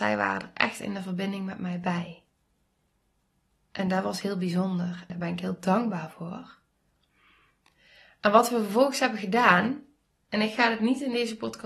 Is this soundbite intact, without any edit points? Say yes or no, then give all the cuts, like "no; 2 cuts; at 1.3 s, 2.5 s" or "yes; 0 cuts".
no; 1 cut; at 5.1 s